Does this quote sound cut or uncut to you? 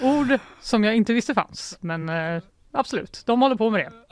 uncut